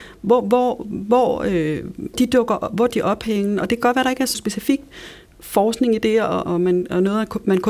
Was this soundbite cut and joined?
yes; 4 cuts; at 2.1 s, 2.9 s, 4.3 s, 6.4 s

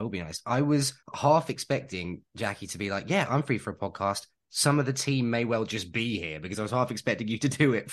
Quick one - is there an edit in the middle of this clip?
yes; 2 cuts; at 1.0 s, 2.3 s

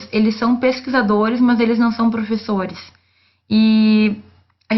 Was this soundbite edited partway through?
no; 0 cuts

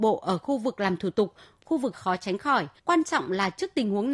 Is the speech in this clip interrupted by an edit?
yes; 2 cuts; at 1.9 s, 2.8 s

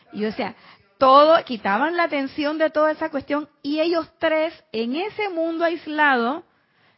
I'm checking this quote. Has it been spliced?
no; 0 cuts

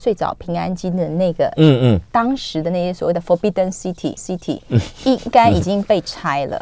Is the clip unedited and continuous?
no; 1 cut; at 4.2 s

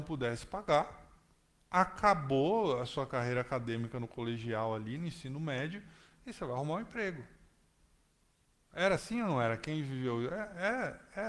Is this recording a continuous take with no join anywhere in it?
yes; 0 cuts

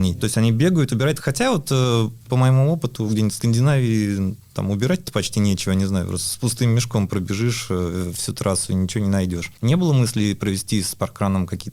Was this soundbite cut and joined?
no; 0 cuts

